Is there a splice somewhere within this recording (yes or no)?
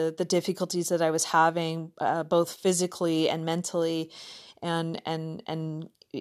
no